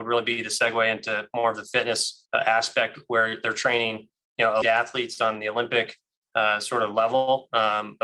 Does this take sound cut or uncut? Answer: cut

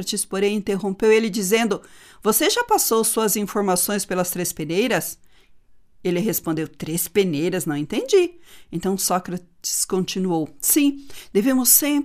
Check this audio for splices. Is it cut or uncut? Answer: uncut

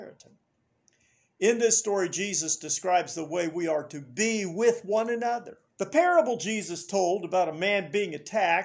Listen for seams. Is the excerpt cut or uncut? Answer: cut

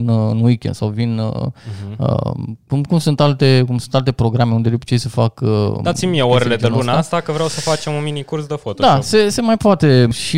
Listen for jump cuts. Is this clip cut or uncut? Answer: uncut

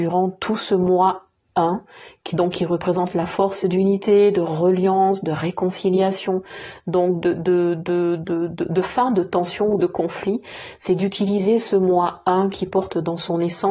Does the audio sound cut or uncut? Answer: uncut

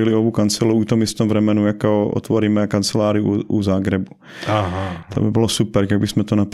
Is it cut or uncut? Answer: uncut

